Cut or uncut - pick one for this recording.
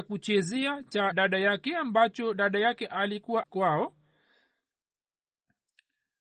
cut